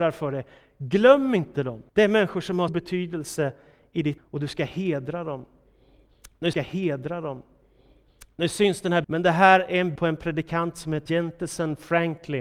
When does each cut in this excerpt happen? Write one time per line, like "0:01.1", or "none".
0:01.9
0:02.7
0:04.2
0:06.5
0:09.0
0:10.0
0:11.1